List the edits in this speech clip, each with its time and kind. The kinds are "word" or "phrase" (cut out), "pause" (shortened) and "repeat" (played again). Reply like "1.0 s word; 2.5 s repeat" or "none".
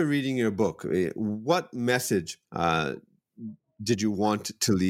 2.5 s pause